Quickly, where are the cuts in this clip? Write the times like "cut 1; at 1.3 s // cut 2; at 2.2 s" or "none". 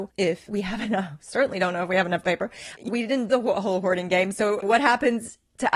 cut 1; at 2.2 s // cut 2; at 2.9 s // cut 3; at 3.3 s // cut 4; at 4.6 s